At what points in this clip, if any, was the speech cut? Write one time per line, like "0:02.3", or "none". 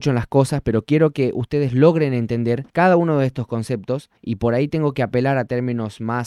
0:02.7
0:04.2